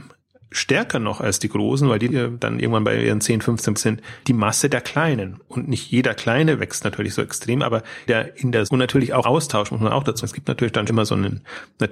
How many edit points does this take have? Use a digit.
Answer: 8